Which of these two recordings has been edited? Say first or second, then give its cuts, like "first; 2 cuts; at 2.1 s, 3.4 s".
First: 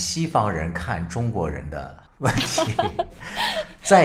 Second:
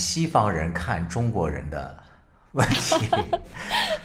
first; 1 cut; at 2.1 s